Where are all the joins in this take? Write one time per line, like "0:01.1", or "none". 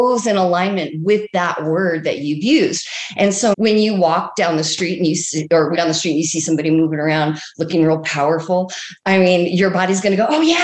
0:03.5
0:05.7